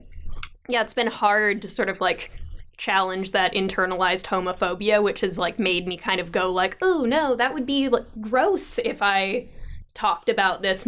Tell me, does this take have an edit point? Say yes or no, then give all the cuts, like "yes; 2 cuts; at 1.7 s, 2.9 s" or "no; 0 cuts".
no; 0 cuts